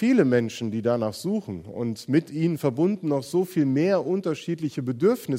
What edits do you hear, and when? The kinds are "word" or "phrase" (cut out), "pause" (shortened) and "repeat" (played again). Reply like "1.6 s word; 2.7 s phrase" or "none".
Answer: none